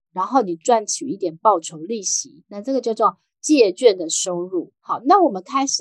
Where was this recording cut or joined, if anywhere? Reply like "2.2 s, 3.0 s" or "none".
4.8 s